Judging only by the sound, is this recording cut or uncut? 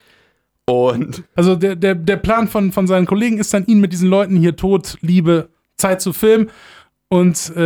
uncut